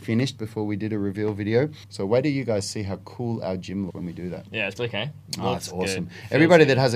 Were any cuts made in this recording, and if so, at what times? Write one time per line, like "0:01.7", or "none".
0:01.8
0:03.9
0:04.8